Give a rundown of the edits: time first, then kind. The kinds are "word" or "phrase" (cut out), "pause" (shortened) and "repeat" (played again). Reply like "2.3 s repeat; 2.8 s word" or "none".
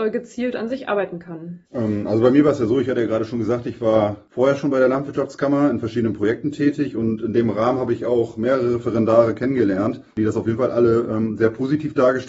1.7 s pause; 10.1 s pause

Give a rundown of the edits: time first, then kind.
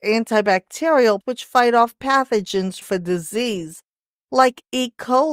1.2 s word; 2.8 s word

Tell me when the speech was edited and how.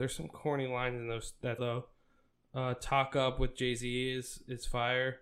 1.6 s word

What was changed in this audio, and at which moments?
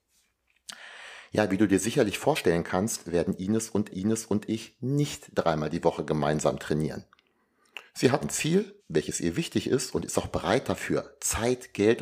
3.9 s repeat; 8.2 s word; 8.8 s pause

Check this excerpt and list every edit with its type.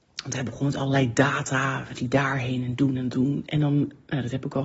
1.9 s word; 2.8 s word; 3.1 s word

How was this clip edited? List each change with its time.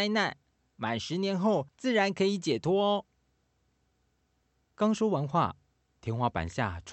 1.7 s pause

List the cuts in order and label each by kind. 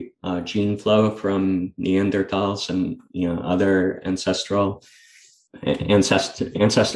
none

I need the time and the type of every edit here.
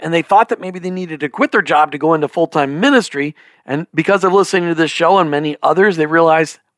none

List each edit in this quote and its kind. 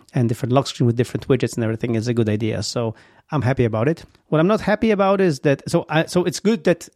none

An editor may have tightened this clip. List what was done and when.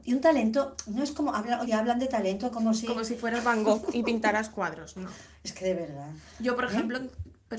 1.7 s word

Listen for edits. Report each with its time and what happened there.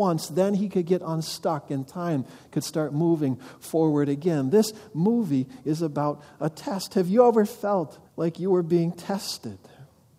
8.1 s pause

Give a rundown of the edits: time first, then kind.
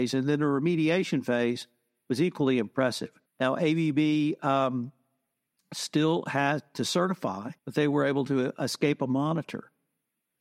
3.3 s pause; 7.6 s pause

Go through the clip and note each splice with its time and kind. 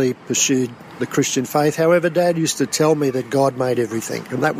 1.0 s word

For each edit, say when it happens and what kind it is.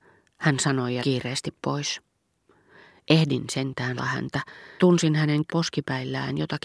1.0 s word; 4.0 s word; 4.8 s word; 5.5 s word

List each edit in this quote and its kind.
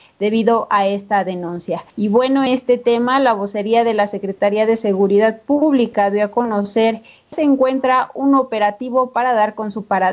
1.9 s pause; 2.5 s word; 7.3 s word

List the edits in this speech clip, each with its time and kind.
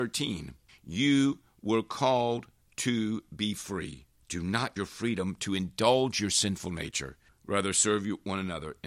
4.8 s word

